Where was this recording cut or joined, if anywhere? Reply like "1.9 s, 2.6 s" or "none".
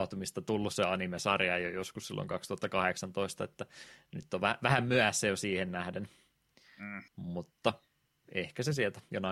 7.1 s